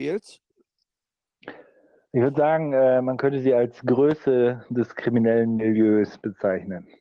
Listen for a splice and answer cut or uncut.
uncut